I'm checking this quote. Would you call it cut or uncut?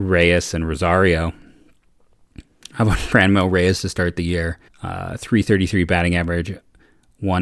cut